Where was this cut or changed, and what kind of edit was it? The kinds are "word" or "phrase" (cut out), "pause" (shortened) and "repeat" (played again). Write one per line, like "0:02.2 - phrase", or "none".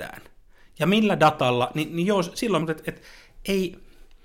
0:02.6 - word